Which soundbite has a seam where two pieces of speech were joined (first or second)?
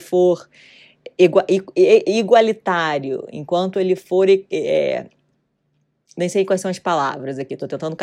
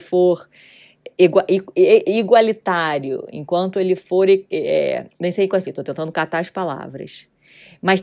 second